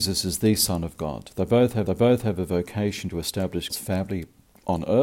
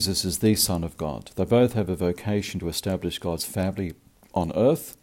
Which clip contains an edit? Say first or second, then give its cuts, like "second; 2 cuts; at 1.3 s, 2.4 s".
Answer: first; 2 cuts; at 1.9 s, 3.7 s